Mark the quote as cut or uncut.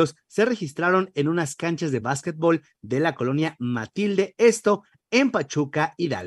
uncut